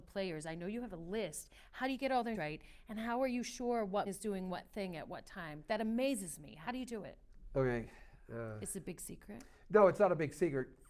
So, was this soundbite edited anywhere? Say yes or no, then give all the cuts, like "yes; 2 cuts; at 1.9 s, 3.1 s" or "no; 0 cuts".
yes; 2 cuts; at 2.3 s, 4.1 s